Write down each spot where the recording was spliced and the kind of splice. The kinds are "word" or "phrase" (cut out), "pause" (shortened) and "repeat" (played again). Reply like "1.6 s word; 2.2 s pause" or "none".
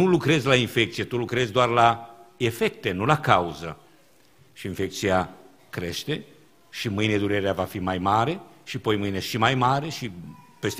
none